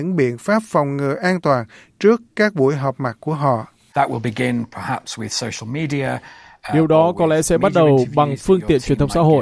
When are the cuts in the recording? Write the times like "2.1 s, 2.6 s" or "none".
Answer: none